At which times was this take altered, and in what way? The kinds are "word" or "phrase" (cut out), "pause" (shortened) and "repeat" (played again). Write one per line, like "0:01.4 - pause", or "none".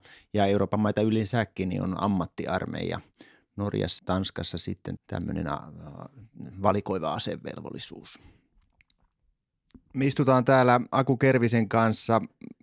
0:04.0 - word
0:05.0 - word